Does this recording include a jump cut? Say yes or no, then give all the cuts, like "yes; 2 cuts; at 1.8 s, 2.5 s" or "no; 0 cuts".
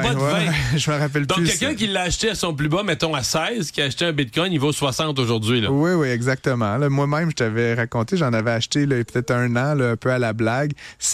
no; 0 cuts